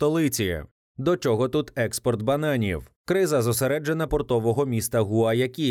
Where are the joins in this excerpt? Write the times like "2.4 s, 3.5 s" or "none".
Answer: 4.1 s